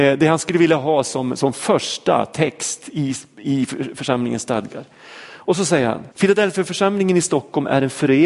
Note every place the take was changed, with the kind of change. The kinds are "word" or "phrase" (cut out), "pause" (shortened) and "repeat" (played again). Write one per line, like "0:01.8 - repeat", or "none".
0:06.1 - pause